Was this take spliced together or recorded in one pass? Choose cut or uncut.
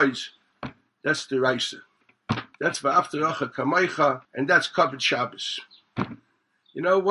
cut